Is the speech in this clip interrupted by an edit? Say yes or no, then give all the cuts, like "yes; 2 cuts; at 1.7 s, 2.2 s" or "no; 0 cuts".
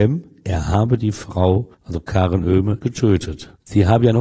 yes; 2 cuts; at 1.7 s, 2.8 s